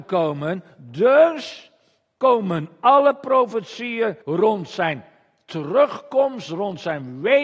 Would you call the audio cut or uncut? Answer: cut